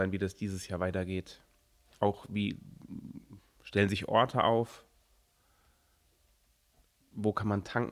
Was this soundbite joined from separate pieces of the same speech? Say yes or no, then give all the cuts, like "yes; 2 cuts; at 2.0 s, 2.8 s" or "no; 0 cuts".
no; 0 cuts